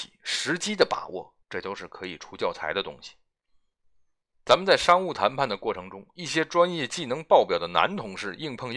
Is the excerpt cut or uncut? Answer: cut